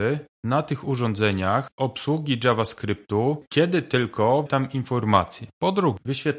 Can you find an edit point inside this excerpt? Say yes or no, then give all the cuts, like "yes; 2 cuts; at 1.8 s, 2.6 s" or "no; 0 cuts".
yes; 2 cuts; at 1.7 s, 4.5 s